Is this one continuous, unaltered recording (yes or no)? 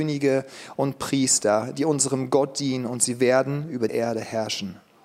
no